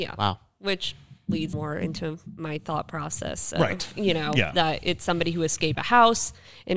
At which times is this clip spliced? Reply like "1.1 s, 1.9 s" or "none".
1.5 s, 5.7 s